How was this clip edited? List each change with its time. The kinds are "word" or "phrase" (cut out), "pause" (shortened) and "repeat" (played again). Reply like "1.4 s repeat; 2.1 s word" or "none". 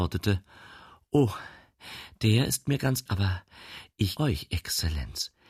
3.1 s word; 4.2 s word